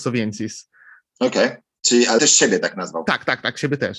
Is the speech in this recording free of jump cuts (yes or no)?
no